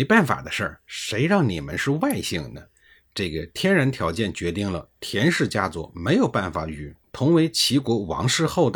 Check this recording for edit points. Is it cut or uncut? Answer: uncut